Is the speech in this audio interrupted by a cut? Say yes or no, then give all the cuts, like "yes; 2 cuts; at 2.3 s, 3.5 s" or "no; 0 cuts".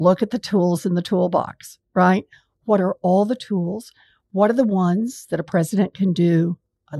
no; 0 cuts